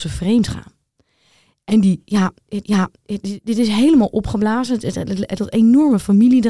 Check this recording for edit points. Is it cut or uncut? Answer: cut